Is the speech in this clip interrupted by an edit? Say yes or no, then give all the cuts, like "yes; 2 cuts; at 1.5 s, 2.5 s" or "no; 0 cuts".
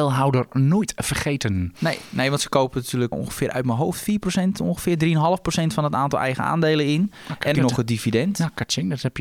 yes; 2 cuts; at 3.1 s, 7.6 s